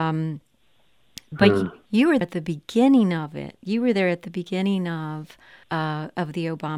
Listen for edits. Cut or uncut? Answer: cut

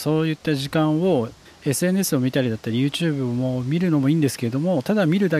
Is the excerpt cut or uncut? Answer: cut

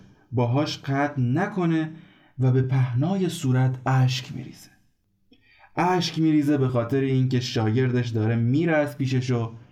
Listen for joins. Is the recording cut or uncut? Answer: uncut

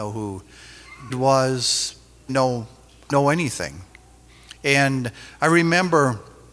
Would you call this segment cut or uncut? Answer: cut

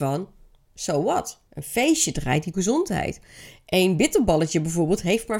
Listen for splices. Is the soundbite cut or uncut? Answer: cut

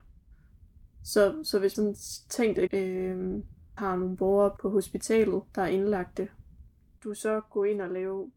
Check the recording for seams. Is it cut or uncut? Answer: cut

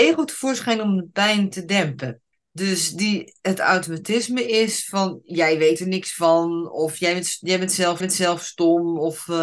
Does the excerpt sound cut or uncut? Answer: cut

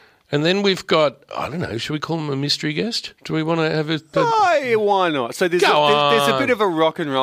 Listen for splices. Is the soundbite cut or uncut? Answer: cut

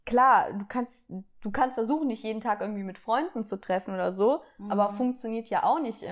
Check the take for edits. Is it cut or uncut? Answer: uncut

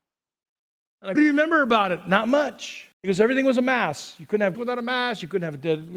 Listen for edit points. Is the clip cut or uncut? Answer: cut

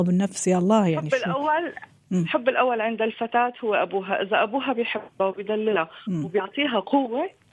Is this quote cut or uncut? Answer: uncut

